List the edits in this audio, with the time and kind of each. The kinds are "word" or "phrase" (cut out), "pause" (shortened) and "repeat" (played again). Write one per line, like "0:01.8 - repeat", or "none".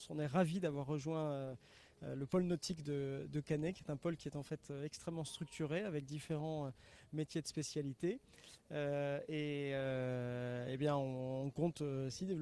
none

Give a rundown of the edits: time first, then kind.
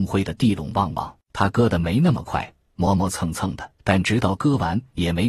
0:01.2 - pause
0:03.8 - pause

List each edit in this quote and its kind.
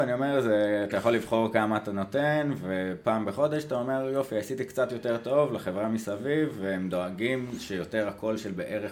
none

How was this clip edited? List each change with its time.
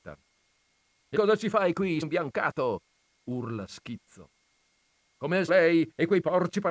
0:01.1 - word
0:02.0 - word
0:05.5 - word

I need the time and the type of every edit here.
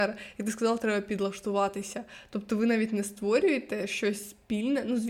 none

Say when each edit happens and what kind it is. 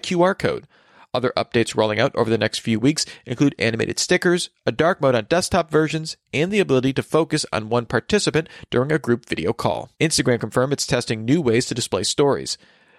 0:09.9 - pause

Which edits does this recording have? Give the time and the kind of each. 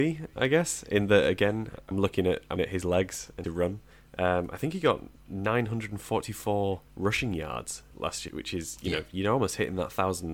0:01.9 - word
0:02.6 - word
0:03.4 - phrase
0:03.9 - pause
0:06.9 - pause
0:08.3 - word

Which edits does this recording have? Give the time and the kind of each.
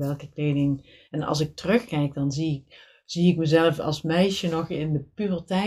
0:01.0 - pause

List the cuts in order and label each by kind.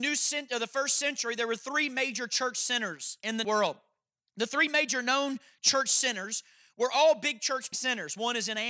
0:03.4 - word
0:07.7 - word

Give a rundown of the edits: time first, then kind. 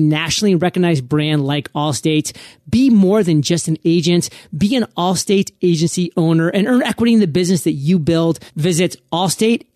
0:08.5 - pause

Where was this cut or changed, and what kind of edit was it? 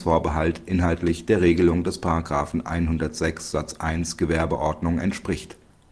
none

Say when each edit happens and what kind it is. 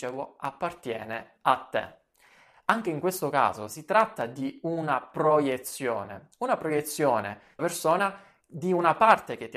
0:07.6 - word

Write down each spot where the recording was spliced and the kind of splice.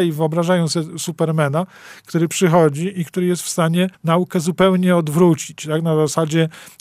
0:03.9 - pause

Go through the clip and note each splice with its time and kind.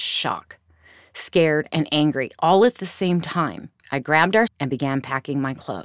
0:03.8 - pause
0:04.5 - word

